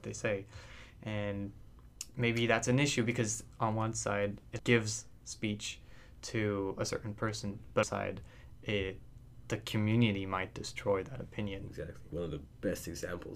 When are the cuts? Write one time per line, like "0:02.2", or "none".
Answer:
0:04.6
0:07.8
0:12.1